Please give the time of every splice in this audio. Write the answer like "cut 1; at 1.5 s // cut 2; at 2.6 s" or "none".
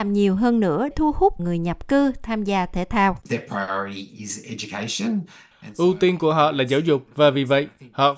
cut 1; at 0.9 s // cut 2; at 1.4 s // cut 3; at 3.2 s // cut 4; at 7.1 s